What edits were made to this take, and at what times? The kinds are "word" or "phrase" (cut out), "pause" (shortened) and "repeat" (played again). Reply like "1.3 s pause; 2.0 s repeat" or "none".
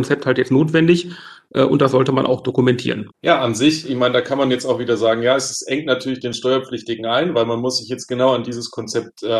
3.1 s pause